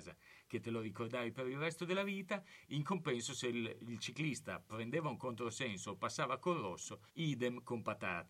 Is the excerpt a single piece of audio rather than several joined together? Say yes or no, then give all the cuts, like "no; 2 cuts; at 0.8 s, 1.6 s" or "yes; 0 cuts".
no; 1 cut; at 7.1 s